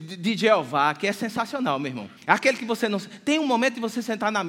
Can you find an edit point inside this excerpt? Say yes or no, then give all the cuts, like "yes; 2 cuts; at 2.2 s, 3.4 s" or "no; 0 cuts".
yes; 1 cut; at 2.2 s